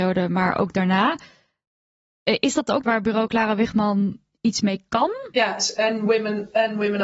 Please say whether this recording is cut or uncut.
cut